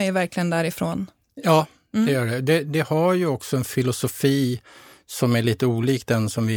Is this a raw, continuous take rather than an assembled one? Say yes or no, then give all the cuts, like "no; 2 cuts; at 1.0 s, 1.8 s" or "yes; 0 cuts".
yes; 0 cuts